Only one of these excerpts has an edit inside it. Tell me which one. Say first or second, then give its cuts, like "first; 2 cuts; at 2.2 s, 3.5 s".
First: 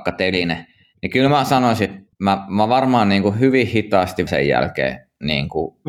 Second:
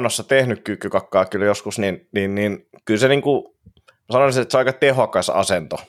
first; 2 cuts; at 2.1 s, 4.3 s